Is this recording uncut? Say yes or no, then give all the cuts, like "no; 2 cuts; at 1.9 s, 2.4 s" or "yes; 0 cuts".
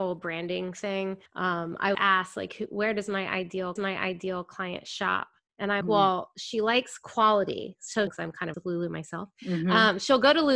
no; 7 cuts; at 1.3 s, 1.9 s, 3.8 s, 5.5 s, 5.8 s, 8.1 s, 8.5 s